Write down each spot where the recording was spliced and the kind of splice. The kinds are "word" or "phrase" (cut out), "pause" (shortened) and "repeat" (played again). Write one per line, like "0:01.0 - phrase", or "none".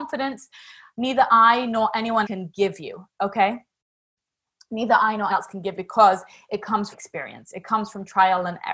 0:02.2 - word
0:05.3 - word
0:05.7 - word
0:06.9 - word